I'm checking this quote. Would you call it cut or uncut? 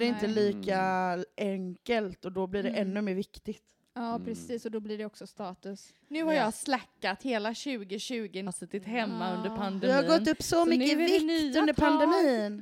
cut